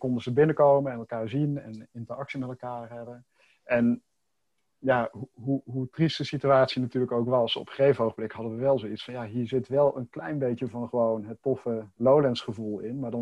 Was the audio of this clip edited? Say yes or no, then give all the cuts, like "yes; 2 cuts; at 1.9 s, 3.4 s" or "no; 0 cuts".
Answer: yes; 1 cut; at 1.6 s